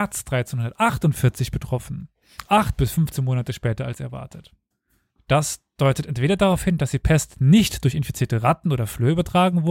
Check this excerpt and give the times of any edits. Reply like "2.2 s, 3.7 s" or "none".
2.5 s, 4.7 s